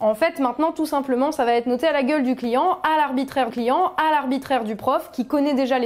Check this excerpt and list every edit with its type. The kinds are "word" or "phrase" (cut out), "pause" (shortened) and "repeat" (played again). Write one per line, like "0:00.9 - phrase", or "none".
0:03.5 - repeat